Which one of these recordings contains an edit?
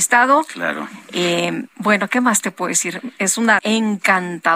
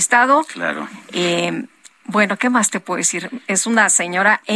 first; 2 cuts; at 1.7 s, 3.6 s

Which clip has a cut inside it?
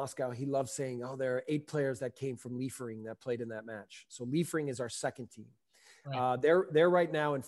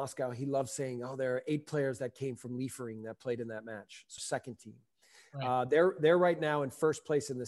second; 1 cut; at 4.2 s

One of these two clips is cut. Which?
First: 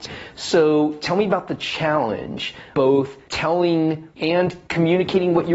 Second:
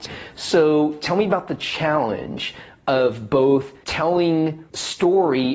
first; 2 cuts; at 2.7 s, 4.2 s

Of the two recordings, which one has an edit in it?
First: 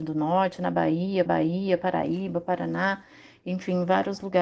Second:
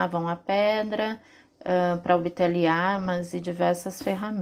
first; 1 cut; at 1.3 s

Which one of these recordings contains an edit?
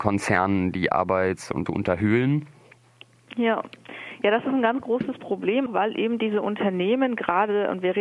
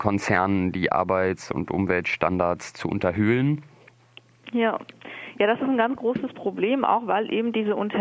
first; 2 cuts; at 1.7 s, 5.7 s

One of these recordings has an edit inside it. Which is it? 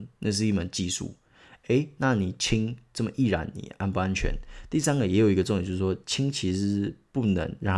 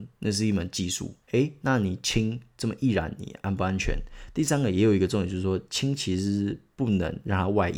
second; 1 cut; at 1.2 s

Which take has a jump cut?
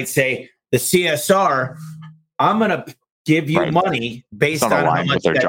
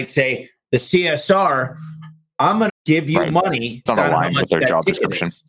second; 2 cuts; at 2.7 s, 3.9 s

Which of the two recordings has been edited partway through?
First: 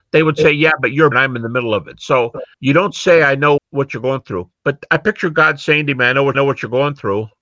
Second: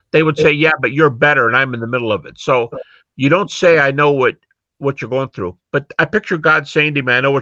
first; 4 cuts; at 1.1 s, 2.5 s, 3.6 s, 6.3 s

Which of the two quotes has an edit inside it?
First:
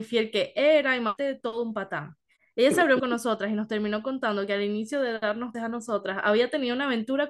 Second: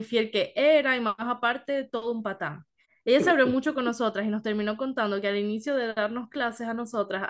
first; 3 cuts; at 1.2 s, 3.0 s, 5.5 s

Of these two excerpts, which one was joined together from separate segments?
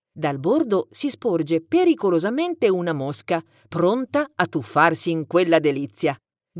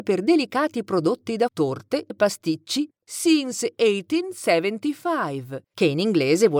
second; 2 cuts; at 1.5 s, 2.1 s

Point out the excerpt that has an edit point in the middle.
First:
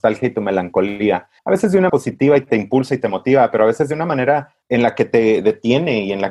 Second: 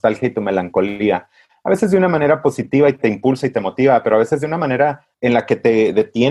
first; 2 cuts; at 1.4 s, 1.9 s

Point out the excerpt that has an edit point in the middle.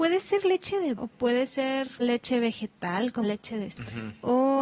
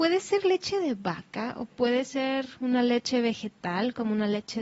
first; 4 cuts; at 1.0 s, 2.0 s, 3.2 s, 3.7 s

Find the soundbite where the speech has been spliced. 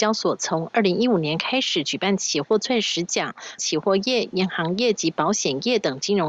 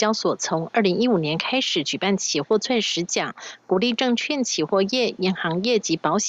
first; 1 cut; at 3.6 s

